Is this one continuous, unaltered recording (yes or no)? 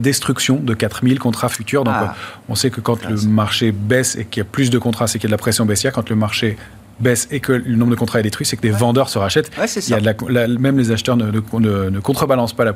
yes